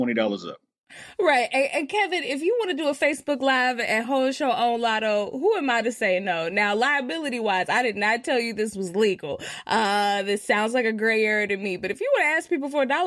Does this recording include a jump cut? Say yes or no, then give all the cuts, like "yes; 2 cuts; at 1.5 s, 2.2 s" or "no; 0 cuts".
no; 0 cuts